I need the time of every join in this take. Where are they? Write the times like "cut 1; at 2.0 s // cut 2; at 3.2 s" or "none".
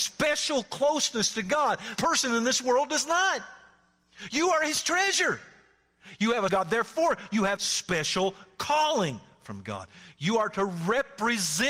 cut 1; at 2.0 s // cut 2; at 6.5 s // cut 3; at 7.6 s